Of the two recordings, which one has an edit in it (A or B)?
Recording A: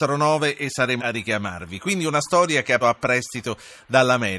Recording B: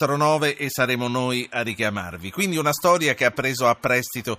A